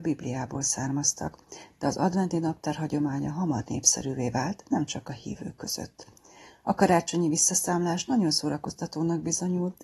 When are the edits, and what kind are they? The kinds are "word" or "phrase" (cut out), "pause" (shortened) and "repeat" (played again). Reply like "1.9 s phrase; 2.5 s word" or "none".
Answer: none